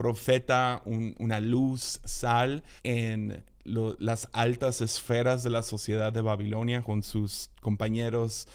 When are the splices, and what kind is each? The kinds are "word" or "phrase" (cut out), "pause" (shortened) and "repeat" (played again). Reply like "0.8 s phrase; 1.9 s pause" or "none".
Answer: 2.8 s pause; 6.8 s word

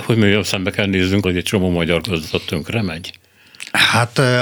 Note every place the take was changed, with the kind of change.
1.2 s word

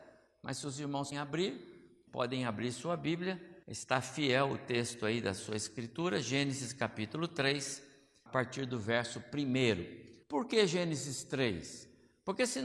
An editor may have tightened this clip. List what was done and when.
1.1 s word; 2.1 s word; 3.6 s pause; 8.3 s word; 10.2 s pause

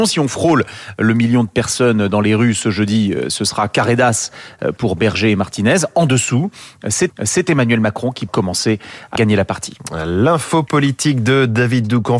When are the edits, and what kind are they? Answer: 7.1 s repeat; 8.3 s word; 9.2 s word

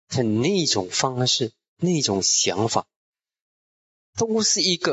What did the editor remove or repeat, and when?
none

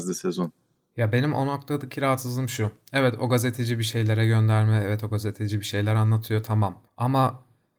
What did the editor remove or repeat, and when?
6.9 s pause

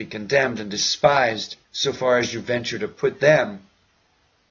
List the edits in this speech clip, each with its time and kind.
1.6 s pause

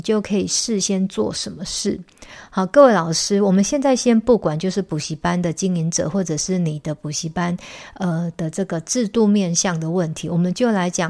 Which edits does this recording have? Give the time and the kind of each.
none

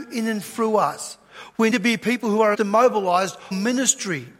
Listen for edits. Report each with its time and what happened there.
1.7 s word; 2.5 s word; 3.5 s word

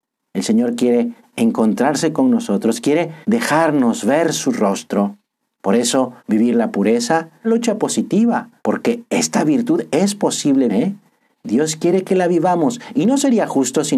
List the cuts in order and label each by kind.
3.2 s pause; 5.3 s pause; 6.2 s pause; 7.4 s phrase; 8.6 s pause; 10.7 s word

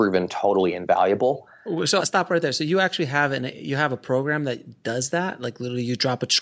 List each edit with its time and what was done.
2.0 s word

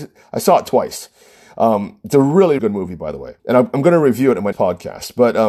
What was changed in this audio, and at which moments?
2.6 s word; 3.4 s pause; 4.5 s word

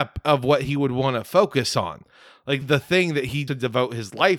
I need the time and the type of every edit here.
2.6 s phrase; 3.5 s word

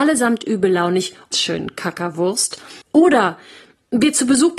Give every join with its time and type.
1.3 s phrase; 2.8 s pause

